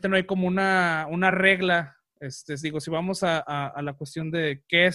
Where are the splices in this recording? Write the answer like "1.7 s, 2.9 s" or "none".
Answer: none